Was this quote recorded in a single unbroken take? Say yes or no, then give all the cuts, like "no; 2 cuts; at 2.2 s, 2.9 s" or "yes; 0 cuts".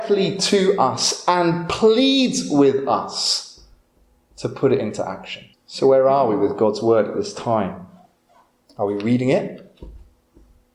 no; 1 cut; at 5.5 s